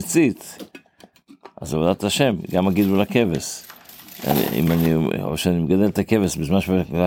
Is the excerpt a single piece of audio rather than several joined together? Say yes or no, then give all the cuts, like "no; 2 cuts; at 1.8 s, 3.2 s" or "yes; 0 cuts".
yes; 0 cuts